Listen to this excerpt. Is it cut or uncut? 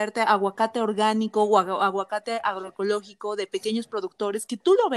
uncut